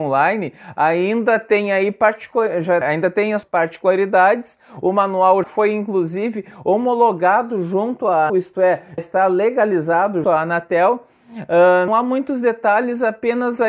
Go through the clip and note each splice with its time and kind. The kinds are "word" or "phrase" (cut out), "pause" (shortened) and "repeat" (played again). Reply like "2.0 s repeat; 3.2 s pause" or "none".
2.8 s word; 3.4 s word; 5.4 s word; 8.3 s word; 9.0 s word; 10.2 s word; 11.9 s word

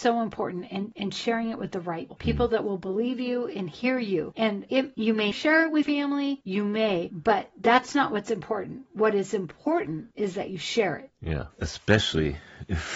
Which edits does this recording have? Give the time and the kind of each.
2.1 s word; 5.3 s word; 5.8 s word

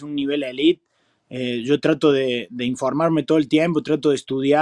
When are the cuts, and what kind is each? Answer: none

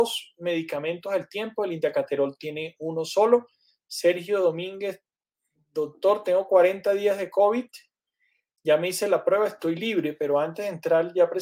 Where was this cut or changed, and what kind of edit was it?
none

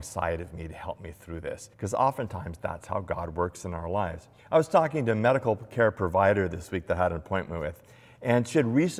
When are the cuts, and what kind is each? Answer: 1.7 s pause; 4.4 s pause

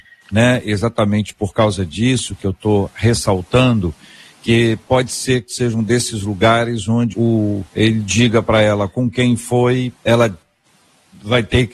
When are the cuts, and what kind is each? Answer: 7.1 s word; 7.7 s pause; 10.0 s pause

